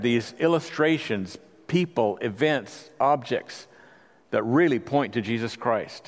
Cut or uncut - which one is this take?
uncut